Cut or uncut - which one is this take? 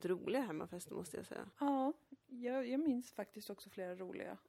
cut